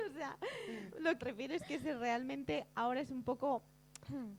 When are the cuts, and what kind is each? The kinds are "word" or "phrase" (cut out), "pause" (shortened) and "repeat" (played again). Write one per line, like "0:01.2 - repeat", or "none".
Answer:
0:01.2 - word

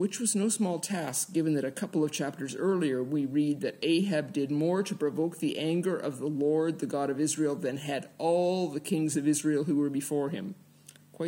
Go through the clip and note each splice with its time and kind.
none

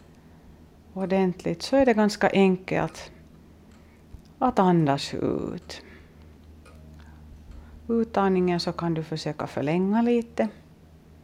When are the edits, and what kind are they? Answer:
none

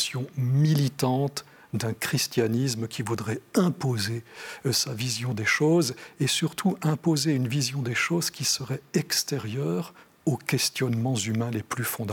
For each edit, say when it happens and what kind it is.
none

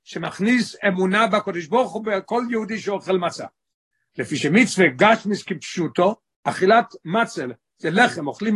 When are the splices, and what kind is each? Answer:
none

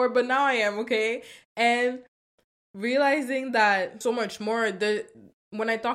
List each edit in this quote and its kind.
0:04.0 - word

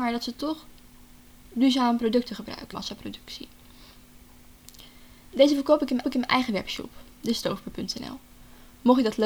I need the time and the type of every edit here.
0:02.7 - phrase
0:06.0 - repeat

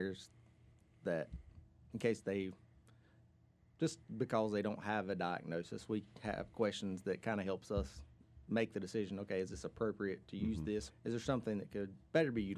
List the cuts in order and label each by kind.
0:10.9 - word

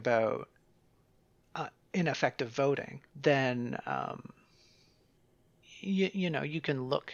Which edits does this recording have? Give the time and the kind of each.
0:03.1 - pause

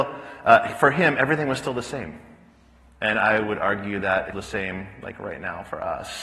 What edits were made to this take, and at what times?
0:04.3 - word

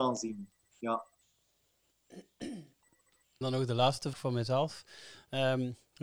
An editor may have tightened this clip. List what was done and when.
0:03.4 - word
0:04.1 - word

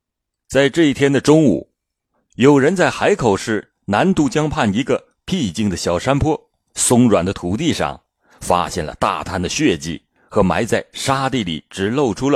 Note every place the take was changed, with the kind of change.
none

